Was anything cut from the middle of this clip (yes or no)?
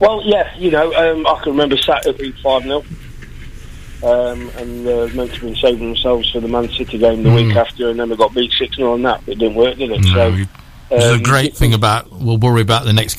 yes